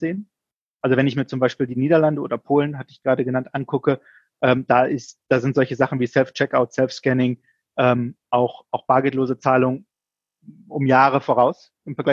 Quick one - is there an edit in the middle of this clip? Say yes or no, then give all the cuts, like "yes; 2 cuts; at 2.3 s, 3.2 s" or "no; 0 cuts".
no; 0 cuts